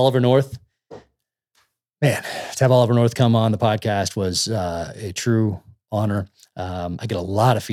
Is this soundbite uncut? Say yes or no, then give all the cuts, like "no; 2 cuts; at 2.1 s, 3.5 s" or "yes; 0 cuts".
yes; 0 cuts